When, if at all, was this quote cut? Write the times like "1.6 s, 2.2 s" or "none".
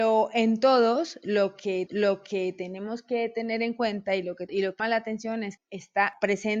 1.9 s, 4.5 s, 4.8 s, 5.6 s